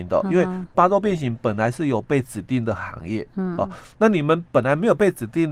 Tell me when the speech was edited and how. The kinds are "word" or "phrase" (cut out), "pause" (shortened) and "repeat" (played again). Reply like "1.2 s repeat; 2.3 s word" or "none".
none